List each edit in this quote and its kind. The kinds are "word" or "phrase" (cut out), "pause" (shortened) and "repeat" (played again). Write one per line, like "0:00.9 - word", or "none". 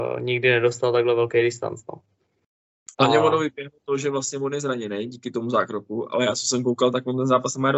0:02.9 - pause